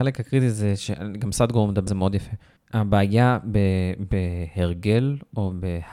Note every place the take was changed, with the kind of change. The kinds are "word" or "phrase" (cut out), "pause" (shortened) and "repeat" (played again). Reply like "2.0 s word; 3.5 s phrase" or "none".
1.9 s word; 2.6 s pause